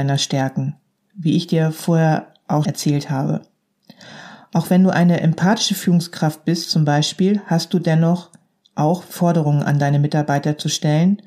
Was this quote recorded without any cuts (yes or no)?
no